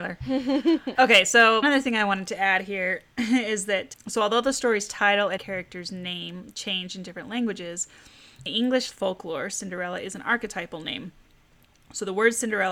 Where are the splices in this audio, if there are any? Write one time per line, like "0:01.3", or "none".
0:01.0
0:01.6
0:03.9
0:05.4
0:08.5
0:08.9